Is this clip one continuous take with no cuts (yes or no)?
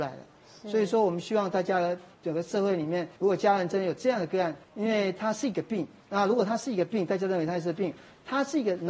no